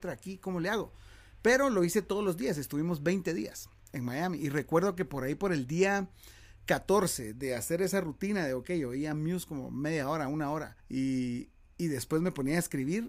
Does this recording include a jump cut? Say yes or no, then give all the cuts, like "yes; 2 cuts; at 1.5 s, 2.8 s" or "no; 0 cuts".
yes; 1 cut; at 10.8 s